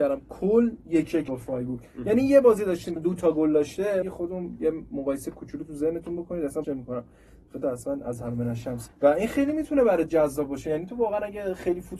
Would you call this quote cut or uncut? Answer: cut